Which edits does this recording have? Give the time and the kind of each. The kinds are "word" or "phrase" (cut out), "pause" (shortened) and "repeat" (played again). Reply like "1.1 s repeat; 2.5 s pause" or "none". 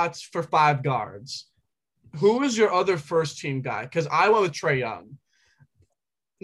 none